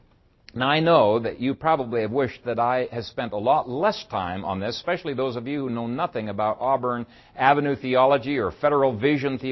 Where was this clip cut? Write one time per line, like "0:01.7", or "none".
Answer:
none